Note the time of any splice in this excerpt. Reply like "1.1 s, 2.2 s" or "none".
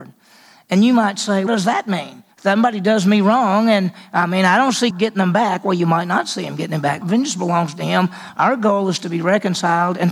1.5 s, 2.3 s, 4.9 s, 7.0 s